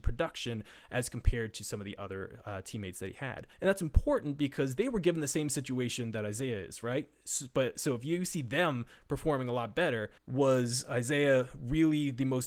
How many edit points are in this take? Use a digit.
2